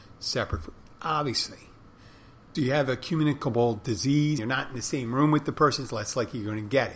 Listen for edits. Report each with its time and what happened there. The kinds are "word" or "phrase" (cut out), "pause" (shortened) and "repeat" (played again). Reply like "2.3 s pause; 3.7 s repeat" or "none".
2.5 s word; 4.4 s word